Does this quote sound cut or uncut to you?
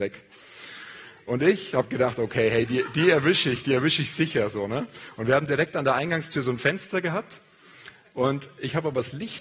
uncut